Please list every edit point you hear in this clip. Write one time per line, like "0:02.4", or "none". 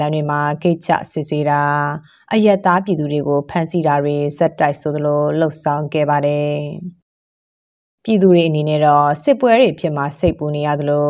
none